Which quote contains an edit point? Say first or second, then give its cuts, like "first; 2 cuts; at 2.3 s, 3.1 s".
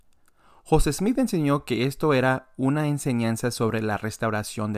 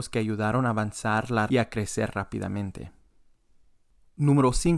second; 1 cut; at 1.5 s